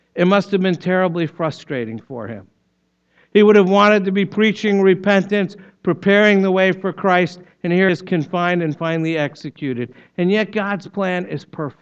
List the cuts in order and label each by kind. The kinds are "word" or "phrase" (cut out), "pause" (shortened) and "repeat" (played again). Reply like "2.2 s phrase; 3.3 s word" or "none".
7.9 s word